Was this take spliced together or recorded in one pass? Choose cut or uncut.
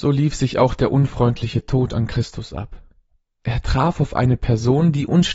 uncut